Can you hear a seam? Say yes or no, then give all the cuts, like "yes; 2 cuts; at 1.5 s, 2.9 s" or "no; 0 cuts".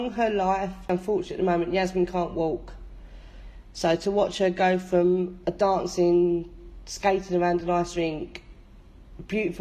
no; 0 cuts